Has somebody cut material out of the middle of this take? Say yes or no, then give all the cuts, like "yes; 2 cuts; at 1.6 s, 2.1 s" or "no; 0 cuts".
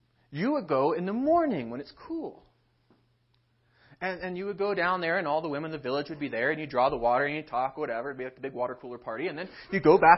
no; 0 cuts